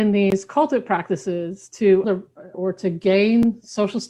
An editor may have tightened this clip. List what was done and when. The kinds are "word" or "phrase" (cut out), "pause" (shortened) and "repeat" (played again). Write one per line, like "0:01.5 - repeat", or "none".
0:02.0 - word
0:02.5 - word